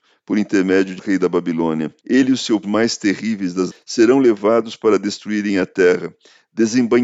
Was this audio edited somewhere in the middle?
yes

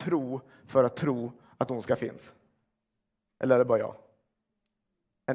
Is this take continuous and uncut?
yes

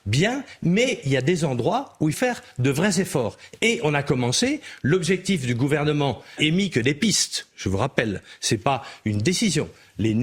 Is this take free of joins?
no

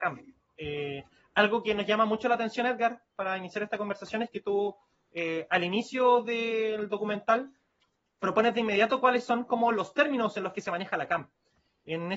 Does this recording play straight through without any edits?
yes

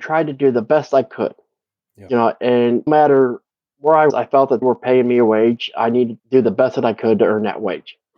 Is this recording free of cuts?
no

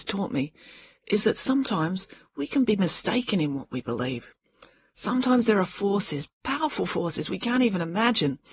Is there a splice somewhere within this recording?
no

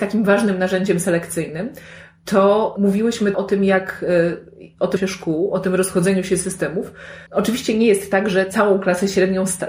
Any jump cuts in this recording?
yes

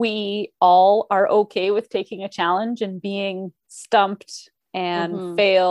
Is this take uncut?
yes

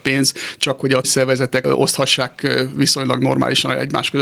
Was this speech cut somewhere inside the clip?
yes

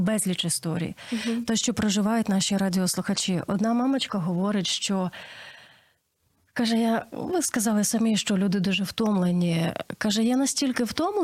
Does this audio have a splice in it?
no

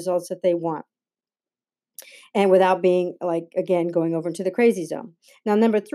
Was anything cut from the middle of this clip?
no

